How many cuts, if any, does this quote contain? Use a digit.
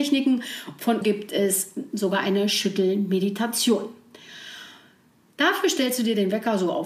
1